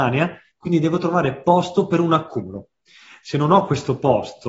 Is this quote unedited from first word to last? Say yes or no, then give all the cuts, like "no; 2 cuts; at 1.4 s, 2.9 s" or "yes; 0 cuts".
yes; 0 cuts